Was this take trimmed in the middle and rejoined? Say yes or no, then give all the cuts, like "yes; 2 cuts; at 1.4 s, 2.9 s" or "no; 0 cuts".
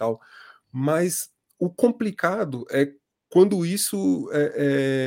no; 0 cuts